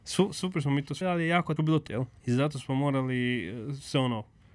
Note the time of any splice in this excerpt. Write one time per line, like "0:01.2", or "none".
0:01.0
0:01.6
0:01.9
0:02.2